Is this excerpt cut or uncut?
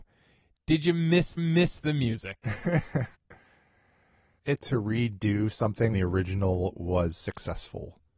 cut